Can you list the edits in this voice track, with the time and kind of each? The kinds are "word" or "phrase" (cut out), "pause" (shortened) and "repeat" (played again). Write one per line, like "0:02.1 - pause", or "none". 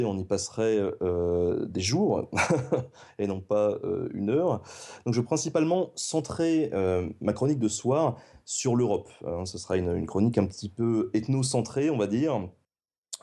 none